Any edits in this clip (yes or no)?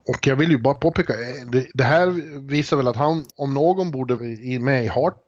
yes